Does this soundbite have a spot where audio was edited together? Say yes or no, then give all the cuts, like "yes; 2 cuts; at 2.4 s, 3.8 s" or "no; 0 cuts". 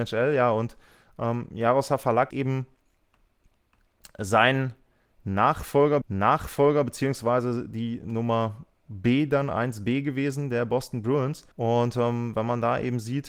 yes; 3 cuts; at 2.3 s, 6.0 s, 11.5 s